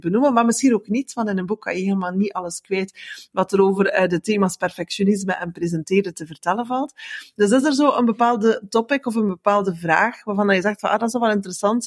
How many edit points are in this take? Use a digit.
0